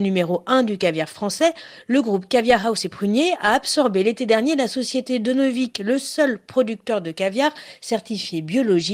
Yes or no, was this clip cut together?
no